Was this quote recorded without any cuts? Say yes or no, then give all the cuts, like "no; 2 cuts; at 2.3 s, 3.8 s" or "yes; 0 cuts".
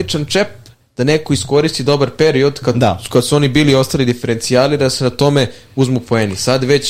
yes; 0 cuts